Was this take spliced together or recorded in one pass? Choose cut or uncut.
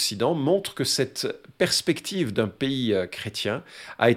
uncut